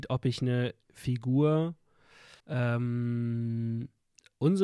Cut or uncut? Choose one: cut